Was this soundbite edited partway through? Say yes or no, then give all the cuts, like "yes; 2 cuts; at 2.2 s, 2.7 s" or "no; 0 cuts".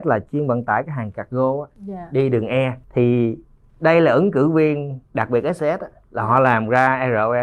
yes; 2 cuts; at 2.8 s, 5.1 s